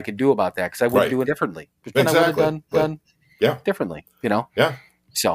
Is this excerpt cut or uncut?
cut